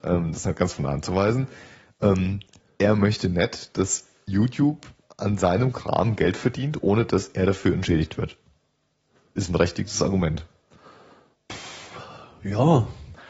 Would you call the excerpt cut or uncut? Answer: uncut